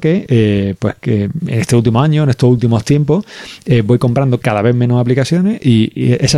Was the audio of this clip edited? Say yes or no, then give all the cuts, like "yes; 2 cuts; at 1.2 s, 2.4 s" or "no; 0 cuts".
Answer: no; 0 cuts